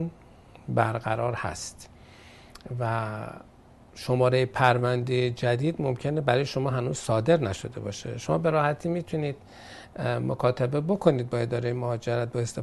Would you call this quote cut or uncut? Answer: uncut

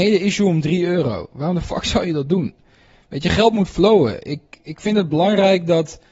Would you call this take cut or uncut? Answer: uncut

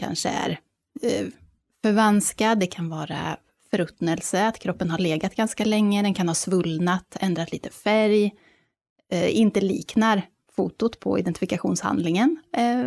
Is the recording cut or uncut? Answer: uncut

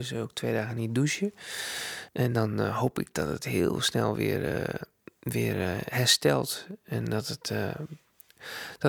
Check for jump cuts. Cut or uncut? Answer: uncut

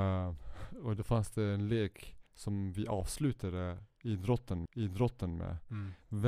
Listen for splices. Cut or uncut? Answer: cut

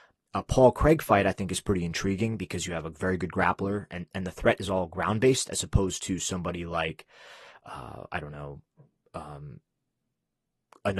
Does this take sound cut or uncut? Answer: uncut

